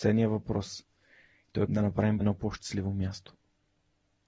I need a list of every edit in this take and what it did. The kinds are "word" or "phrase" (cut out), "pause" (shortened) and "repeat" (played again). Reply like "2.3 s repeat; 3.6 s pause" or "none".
1.7 s phrase; 2.2 s word